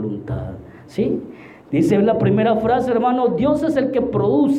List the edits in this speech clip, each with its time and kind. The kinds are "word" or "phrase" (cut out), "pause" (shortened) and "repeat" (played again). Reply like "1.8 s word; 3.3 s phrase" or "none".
none